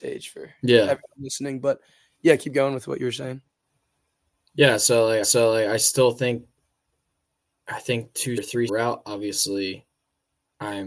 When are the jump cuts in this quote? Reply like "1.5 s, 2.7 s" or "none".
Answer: 5.2 s, 8.4 s, 8.7 s